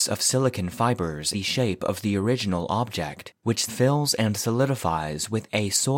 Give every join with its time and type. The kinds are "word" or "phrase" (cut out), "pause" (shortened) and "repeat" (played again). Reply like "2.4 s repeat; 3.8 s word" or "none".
1.3 s word; 3.7 s word